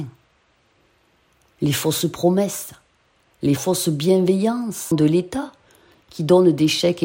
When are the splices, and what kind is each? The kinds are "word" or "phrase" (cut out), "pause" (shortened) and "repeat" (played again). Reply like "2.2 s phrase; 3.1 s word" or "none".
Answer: 3.6 s phrase; 4.9 s word